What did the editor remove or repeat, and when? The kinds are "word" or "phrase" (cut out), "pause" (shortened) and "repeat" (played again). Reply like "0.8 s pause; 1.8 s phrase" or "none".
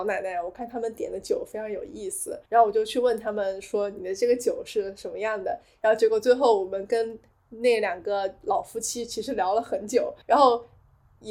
2.5 s pause; 10.2 s pause